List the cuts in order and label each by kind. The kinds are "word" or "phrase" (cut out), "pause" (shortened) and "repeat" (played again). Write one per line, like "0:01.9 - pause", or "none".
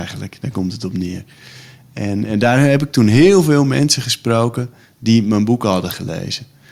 none

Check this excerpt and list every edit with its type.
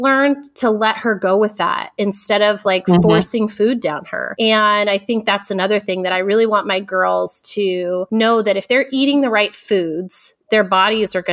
none

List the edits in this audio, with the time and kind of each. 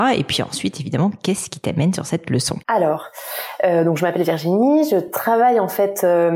0:02.6 - pause

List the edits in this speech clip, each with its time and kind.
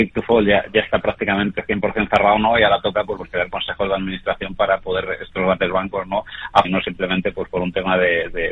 0:03.2 - word
0:05.1 - word
0:06.6 - word

